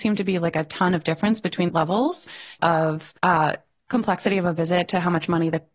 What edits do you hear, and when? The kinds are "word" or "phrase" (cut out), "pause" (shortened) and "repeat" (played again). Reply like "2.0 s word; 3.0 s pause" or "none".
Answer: 1.7 s phrase; 2.6 s word; 3.2 s pause